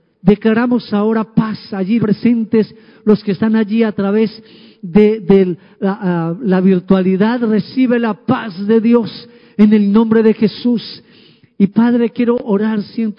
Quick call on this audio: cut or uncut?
cut